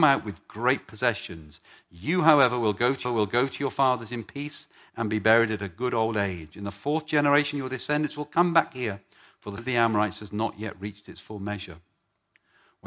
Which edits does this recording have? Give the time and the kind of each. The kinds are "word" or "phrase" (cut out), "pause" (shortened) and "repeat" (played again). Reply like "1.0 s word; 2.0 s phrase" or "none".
3.0 s repeat; 9.6 s word